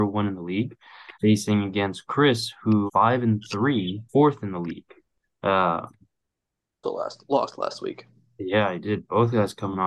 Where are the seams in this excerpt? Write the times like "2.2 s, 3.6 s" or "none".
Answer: 1.1 s, 2.9 s, 4.1 s, 6.8 s